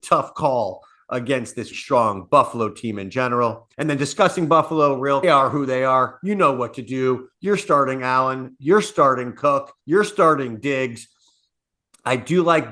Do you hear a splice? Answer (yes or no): yes